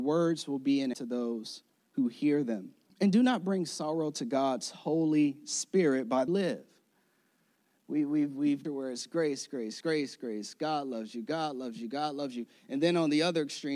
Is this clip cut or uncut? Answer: cut